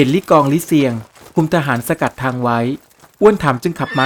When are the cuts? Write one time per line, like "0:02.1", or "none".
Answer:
none